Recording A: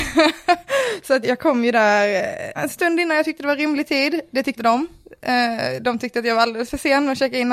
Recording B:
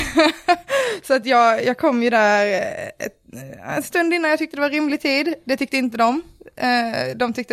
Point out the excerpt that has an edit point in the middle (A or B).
A